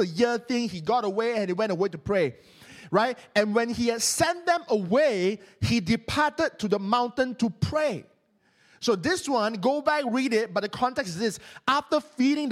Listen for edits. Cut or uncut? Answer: uncut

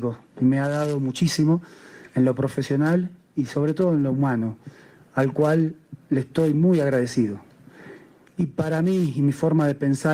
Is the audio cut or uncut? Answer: uncut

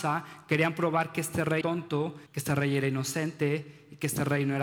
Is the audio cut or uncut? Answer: cut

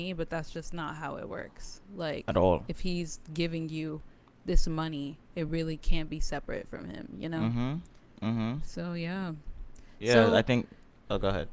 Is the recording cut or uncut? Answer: uncut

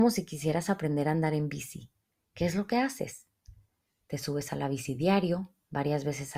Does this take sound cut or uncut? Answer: uncut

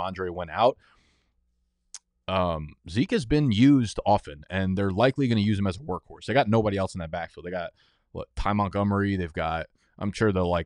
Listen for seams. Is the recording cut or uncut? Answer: uncut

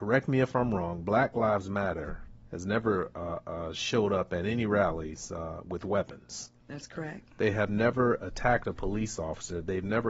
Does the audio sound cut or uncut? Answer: uncut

